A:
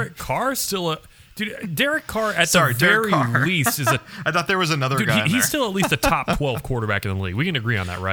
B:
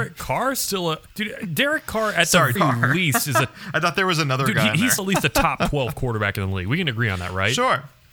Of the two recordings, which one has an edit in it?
B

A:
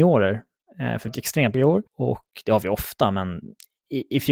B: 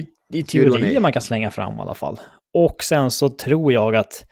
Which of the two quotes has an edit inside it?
A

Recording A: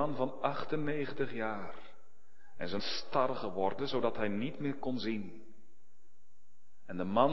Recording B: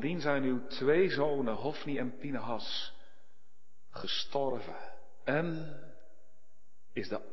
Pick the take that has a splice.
A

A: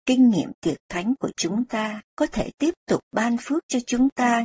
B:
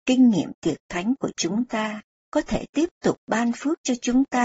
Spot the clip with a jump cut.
A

